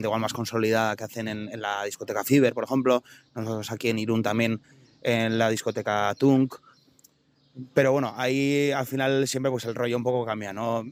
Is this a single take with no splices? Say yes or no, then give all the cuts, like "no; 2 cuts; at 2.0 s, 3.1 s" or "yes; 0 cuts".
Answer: yes; 0 cuts